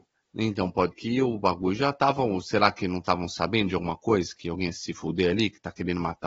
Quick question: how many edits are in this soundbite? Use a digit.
1